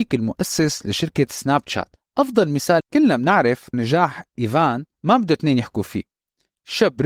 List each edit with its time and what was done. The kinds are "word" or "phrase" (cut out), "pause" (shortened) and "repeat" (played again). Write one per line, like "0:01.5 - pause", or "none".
0:02.0 - pause
0:02.8 - word
0:03.7 - word
0:04.9 - pause